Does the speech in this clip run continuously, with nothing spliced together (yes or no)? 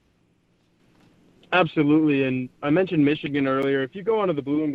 yes